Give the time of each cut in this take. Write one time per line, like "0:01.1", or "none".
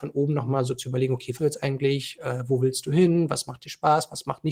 0:01.4